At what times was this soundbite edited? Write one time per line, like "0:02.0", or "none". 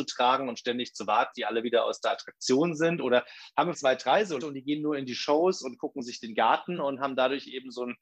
0:01.3
0:03.7
0:04.4
0:06.8

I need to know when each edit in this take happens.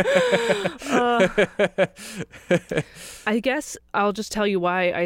0:03.9

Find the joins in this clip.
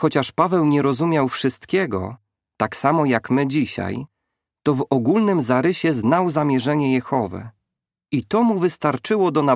none

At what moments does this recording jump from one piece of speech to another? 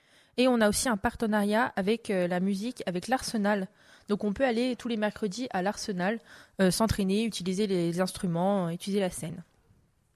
none

